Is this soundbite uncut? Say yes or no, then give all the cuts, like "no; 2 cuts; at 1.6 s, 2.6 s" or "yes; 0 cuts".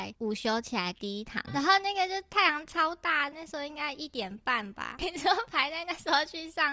no; 2 cuts; at 1.5 s, 3.3 s